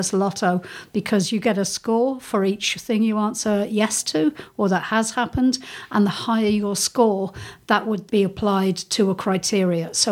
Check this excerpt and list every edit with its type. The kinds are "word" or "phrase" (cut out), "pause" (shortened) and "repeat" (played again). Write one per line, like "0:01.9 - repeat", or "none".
0:08.1 - word